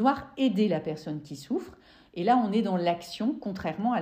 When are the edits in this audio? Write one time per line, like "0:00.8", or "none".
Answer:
none